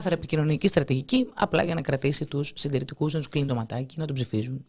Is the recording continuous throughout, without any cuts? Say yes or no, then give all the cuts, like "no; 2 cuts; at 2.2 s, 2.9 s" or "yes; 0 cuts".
yes; 0 cuts